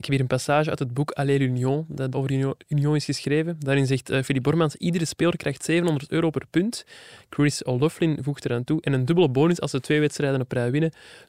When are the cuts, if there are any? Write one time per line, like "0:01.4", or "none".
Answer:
0:02.1